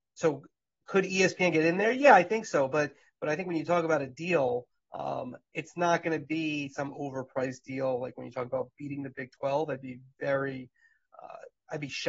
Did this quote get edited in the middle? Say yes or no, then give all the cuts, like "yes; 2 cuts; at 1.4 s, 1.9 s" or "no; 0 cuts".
no; 0 cuts